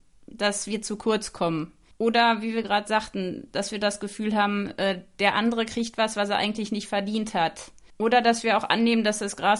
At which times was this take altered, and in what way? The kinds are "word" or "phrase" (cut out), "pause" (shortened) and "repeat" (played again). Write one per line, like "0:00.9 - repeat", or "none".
0:01.9 - pause
0:07.9 - pause